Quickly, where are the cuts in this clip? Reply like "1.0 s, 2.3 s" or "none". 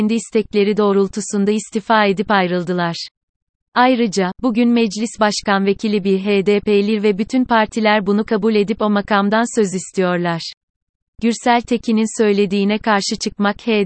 none